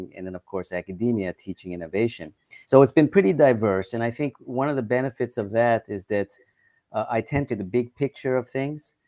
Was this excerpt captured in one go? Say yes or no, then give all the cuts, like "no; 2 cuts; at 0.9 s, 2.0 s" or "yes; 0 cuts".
no; 2 cuts; at 2.6 s, 7.5 s